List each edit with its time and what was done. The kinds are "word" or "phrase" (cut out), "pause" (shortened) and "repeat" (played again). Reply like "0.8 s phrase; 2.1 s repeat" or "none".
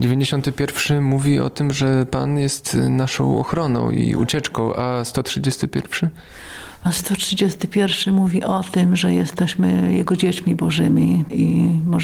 none